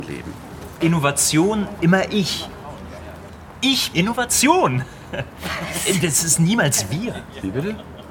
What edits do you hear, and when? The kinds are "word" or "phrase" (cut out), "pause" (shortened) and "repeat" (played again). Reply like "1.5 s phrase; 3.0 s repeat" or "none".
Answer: 1.8 s word; 3.9 s word